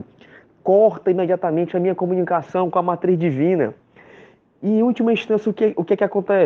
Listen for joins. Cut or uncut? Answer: uncut